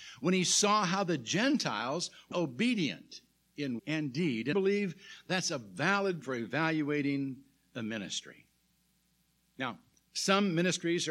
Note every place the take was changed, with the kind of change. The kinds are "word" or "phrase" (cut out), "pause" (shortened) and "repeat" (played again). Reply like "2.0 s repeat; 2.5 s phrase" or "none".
2.3 s word; 3.8 s word; 4.5 s word; 6.2 s word